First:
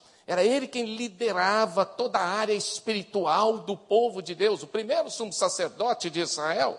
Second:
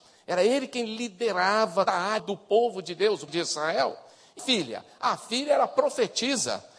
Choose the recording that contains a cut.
second; 4 cuts; at 1.9 s, 2.2 s, 3.3 s, 4.4 s

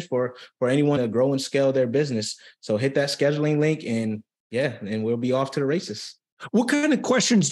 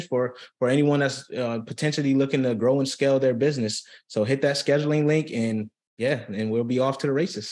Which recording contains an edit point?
first; 1 cut; at 1.0 s

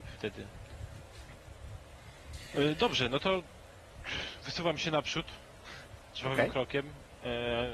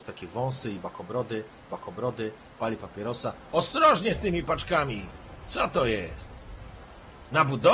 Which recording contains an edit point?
second; 1 cut; at 1.7 s

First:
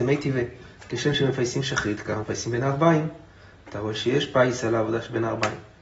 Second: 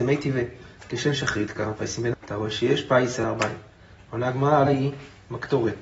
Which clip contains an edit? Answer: second; 4 cuts; at 1.1 s, 2.1 s, 3.2 s, 4.7 s

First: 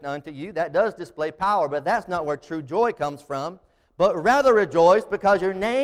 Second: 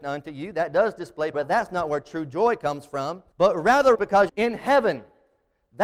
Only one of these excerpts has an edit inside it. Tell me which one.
second; 4 cuts; at 1.3 s, 3.3 s, 3.9 s, 4.3 s

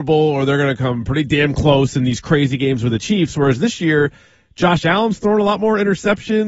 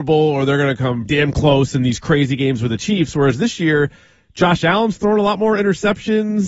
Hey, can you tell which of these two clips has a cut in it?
second; 1 cut; at 1.1 s

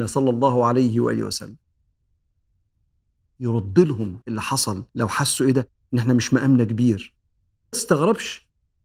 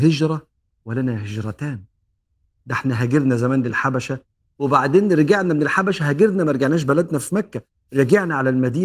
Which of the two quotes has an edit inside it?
first; 3 cuts; at 4.2 s, 4.9 s, 7.7 s

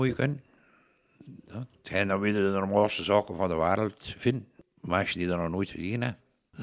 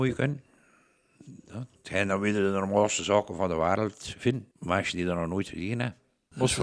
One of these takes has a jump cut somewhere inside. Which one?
second; 1 cut; at 4.5 s

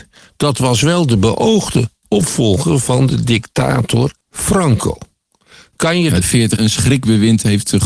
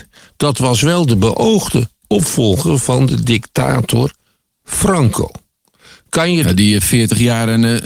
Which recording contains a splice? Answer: first; 3 cuts; at 4.2 s, 6.2 s, 6.6 s

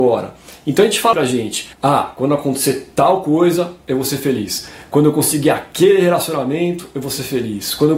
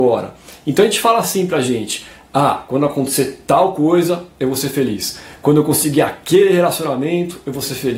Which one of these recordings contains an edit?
first; 2 cuts; at 1.1 s, 1.7 s

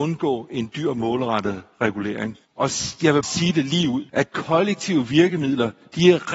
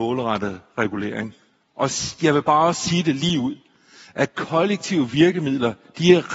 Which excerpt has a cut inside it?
first; 3 cuts; at 2.4 s, 3.2 s, 4.1 s

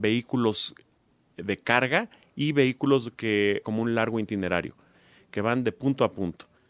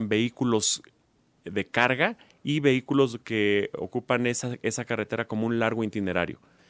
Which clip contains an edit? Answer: first; 1 cut; at 3.6 s

